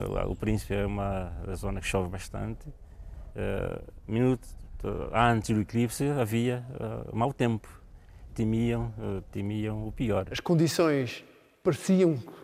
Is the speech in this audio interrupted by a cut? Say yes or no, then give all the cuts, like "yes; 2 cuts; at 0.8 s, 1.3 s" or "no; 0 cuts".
yes; 1 cut; at 8.3 s